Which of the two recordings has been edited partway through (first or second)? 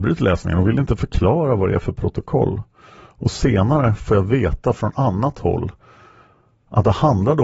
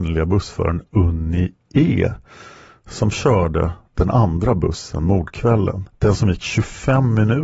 second